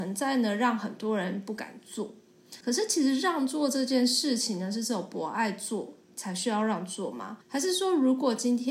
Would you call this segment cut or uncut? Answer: cut